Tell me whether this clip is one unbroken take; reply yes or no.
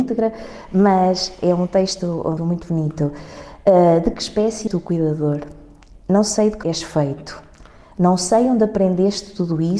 no